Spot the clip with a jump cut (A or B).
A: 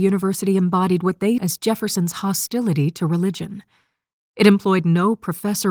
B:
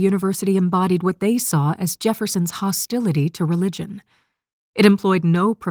A